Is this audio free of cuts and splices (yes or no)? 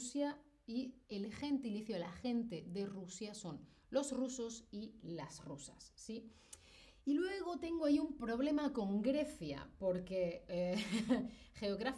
no